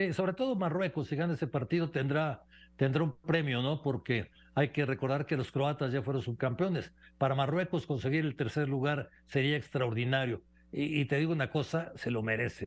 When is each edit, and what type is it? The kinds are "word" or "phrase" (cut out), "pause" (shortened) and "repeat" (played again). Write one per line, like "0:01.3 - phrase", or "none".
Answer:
none

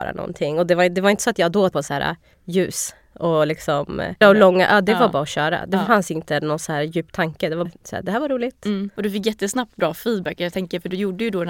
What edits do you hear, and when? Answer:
0:01.7 - word
0:04.2 - word
0:07.7 - word

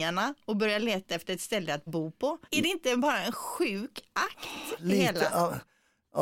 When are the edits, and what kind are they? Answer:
0:01.9 - word
0:02.4 - pause

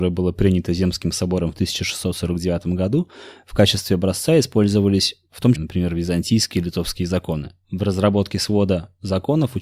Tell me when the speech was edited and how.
0:05.5 - phrase
0:07.6 - pause

